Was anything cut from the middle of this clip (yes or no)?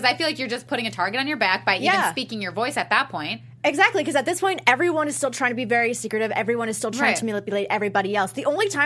no